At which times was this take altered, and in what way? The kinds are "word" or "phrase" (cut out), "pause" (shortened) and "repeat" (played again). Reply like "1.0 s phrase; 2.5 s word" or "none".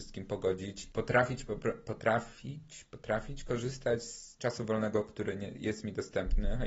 0.9 s word; 2.9 s word; 4.4 s word